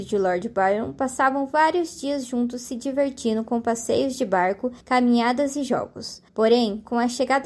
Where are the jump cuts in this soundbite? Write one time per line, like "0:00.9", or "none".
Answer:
0:04.8
0:06.3